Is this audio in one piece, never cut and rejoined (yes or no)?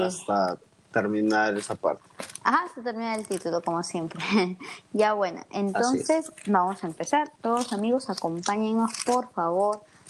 no